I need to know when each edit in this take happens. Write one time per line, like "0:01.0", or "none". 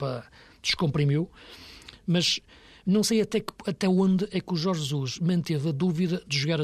none

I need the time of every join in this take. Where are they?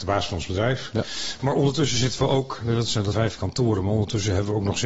0:03.1

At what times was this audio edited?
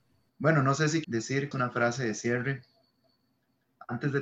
0:01.0
0:01.5

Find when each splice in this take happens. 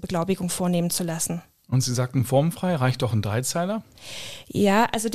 none

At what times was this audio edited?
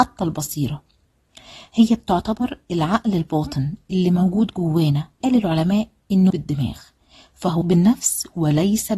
0:05.2
0:06.3
0:07.6

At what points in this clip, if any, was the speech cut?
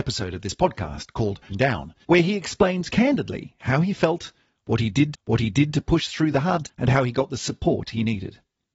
0:01.5
0:02.0
0:02.9
0:05.1
0:06.6

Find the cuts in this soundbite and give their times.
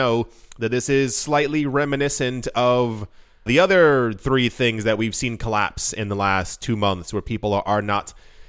0:03.5

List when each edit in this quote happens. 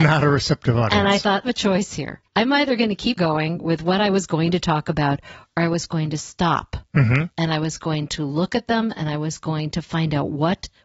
0:01.5
0:02.3
0:03.2
0:07.3

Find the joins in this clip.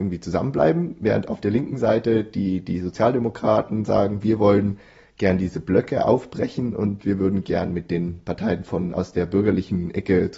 none

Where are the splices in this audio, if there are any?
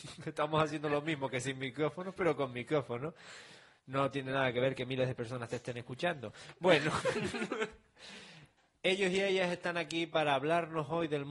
none

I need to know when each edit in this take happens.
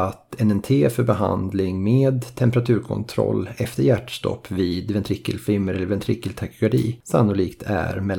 none

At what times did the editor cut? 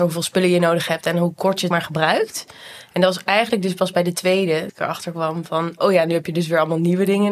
0:01.7
0:04.7

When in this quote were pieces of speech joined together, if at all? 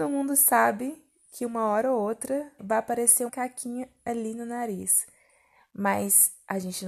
0:02.6
0:03.3

